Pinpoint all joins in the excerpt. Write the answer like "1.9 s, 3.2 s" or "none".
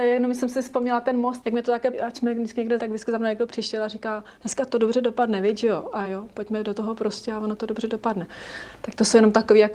1.4 s, 1.9 s, 2.8 s, 4.4 s, 6.0 s